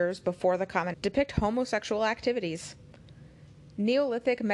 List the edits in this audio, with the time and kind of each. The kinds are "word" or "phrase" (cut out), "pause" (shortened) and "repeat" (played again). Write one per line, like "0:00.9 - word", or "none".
0:00.9 - word